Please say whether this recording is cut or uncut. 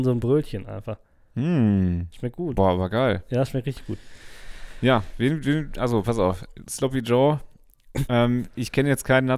uncut